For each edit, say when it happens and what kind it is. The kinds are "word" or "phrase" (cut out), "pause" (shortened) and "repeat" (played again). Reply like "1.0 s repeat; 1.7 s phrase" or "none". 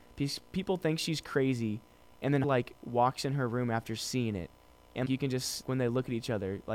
2.4 s word; 5.1 s word; 5.6 s word